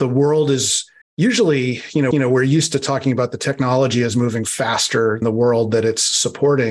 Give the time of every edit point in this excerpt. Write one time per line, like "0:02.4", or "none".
0:01.0
0:02.1
0:05.2